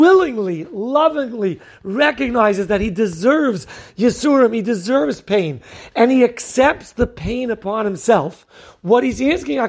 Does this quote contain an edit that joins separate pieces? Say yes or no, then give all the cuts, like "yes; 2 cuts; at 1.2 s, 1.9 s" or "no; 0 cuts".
no; 0 cuts